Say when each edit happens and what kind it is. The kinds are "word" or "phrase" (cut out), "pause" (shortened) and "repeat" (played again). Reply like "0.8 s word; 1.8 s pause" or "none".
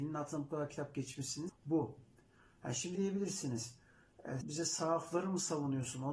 1.5 s word; 2.9 s word; 4.4 s word